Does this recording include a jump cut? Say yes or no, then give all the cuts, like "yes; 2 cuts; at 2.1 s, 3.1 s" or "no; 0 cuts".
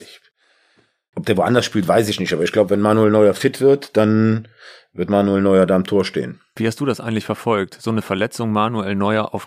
no; 0 cuts